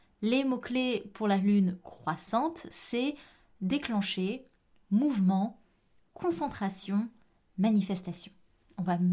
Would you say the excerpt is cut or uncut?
uncut